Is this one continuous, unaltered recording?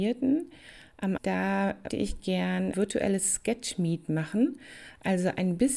no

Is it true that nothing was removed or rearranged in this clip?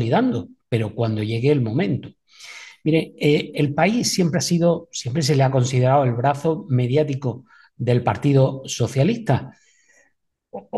yes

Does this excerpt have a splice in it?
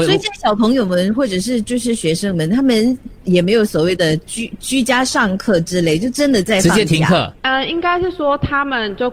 yes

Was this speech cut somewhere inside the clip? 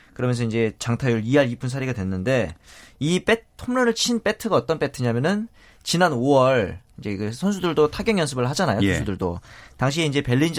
no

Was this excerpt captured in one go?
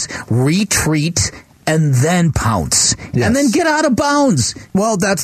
yes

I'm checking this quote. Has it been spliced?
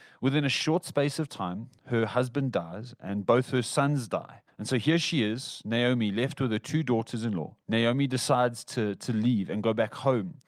yes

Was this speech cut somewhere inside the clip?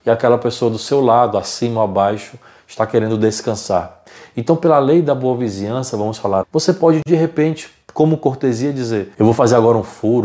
yes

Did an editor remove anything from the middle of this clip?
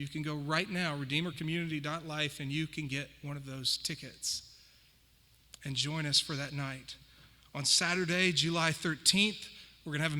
no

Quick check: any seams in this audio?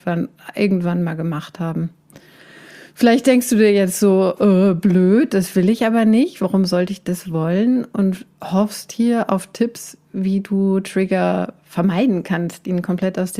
no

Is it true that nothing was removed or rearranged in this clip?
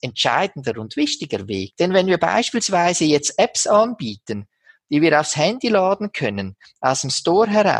yes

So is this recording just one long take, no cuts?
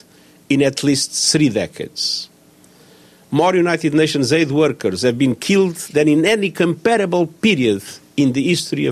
yes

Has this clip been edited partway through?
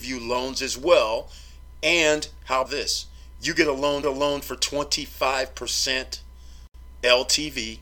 yes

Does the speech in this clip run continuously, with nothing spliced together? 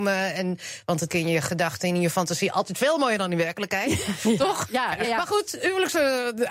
no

